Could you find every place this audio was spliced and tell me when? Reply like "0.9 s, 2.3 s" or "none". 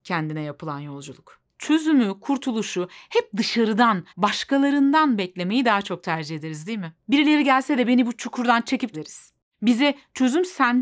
1.5 s, 4.1 s, 7.0 s, 8.9 s